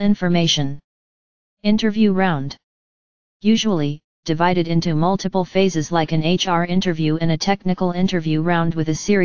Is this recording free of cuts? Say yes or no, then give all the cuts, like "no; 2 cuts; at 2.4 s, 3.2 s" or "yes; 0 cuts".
no; 1 cut; at 4.2 s